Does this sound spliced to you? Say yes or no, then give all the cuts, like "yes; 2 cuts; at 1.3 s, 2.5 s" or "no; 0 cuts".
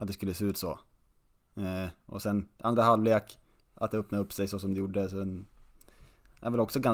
no; 0 cuts